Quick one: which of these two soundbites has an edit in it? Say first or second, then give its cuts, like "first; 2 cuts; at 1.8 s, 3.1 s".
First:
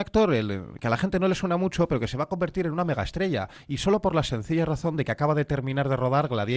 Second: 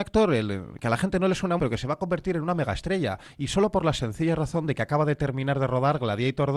second; 1 cut; at 1.6 s